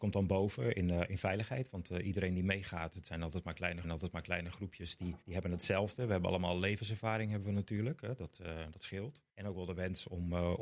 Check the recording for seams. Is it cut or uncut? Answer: cut